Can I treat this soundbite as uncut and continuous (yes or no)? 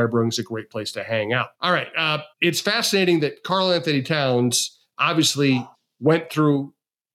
no